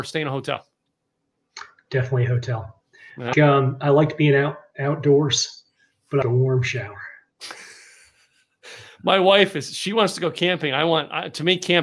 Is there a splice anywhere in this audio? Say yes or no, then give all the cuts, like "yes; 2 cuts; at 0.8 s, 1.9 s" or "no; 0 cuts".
yes; 2 cuts; at 3.3 s, 6.2 s